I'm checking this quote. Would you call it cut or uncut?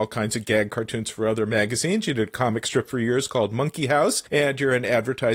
uncut